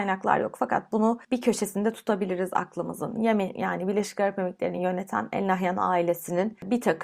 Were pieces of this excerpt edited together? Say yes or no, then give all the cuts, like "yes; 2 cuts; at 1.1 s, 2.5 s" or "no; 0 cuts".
no; 0 cuts